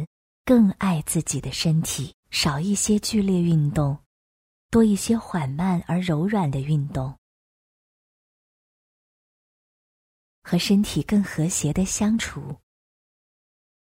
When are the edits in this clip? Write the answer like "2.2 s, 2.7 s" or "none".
2.2 s